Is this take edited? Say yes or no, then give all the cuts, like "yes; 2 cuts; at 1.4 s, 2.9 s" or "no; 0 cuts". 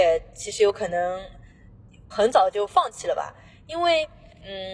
yes; 1 cut; at 2.1 s